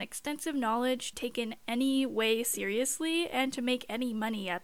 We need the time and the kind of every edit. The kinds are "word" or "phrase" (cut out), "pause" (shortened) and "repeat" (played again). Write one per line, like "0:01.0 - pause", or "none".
0:01.1 - phrase